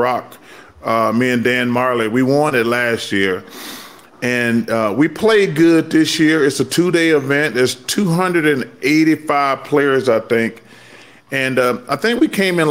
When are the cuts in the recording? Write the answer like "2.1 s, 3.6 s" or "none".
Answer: none

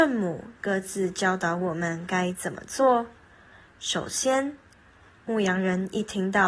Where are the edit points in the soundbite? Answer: none

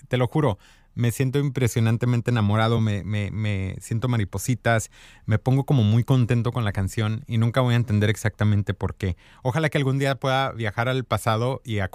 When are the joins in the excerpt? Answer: none

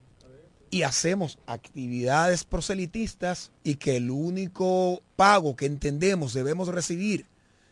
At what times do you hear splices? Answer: 3.6 s, 5.1 s

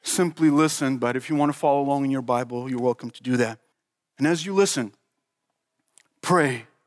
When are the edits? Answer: 3.7 s

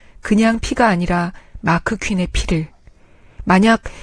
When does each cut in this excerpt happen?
none

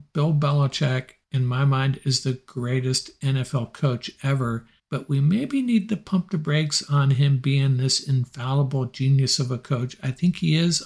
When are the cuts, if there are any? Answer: 1.2 s, 4.8 s

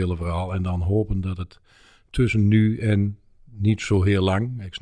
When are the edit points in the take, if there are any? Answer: none

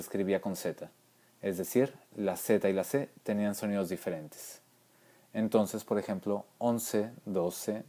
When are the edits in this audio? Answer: none

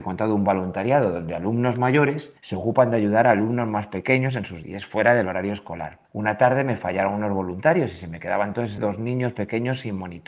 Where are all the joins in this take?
2.4 s, 4.6 s, 6.0 s, 8.8 s

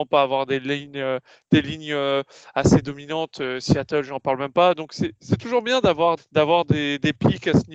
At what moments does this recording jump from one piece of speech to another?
6.2 s

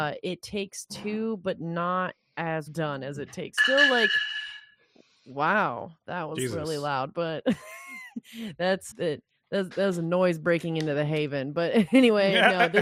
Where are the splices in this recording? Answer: 2.7 s, 3.6 s, 8.9 s

